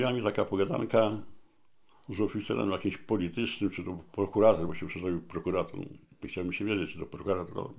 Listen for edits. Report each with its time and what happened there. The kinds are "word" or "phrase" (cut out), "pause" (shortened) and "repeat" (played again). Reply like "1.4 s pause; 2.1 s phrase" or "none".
none